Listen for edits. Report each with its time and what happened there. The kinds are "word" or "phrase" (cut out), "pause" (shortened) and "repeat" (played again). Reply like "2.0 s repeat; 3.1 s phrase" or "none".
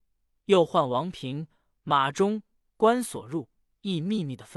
none